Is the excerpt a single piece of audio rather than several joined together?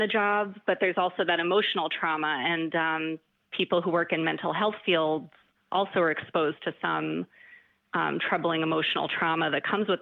yes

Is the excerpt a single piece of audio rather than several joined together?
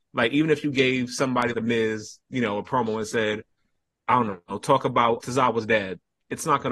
no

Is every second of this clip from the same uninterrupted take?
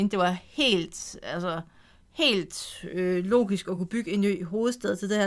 yes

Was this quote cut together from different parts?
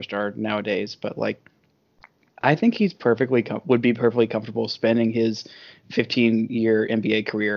no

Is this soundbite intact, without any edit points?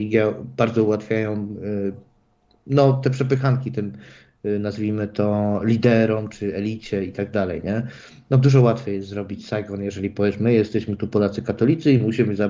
yes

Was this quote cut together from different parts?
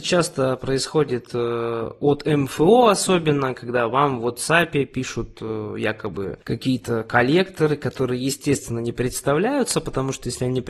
no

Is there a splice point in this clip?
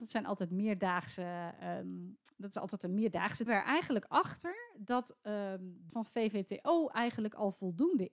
yes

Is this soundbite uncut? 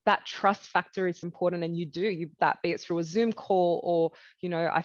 no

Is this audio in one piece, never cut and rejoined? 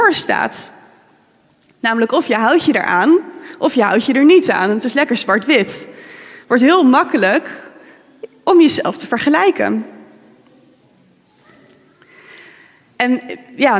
yes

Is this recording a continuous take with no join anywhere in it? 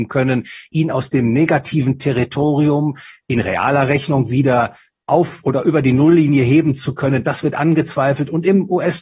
yes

